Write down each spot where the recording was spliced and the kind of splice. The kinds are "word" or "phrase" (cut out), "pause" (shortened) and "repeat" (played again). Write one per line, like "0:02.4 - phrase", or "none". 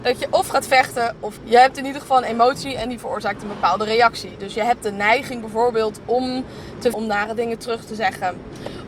0:01.4 - phrase
0:06.9 - word